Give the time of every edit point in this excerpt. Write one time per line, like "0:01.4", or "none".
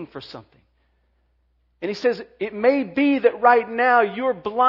none